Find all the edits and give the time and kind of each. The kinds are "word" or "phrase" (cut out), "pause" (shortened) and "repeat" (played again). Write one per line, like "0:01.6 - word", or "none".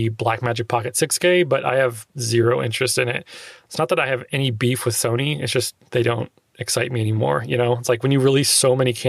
0:05.8 - pause